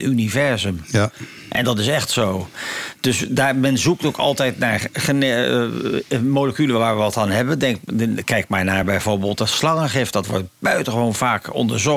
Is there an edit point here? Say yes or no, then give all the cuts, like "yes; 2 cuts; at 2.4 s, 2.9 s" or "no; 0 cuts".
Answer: no; 0 cuts